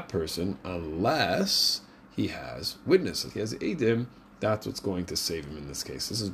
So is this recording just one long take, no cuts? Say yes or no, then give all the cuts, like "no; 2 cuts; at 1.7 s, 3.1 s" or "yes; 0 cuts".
no; 1 cut; at 3.3 s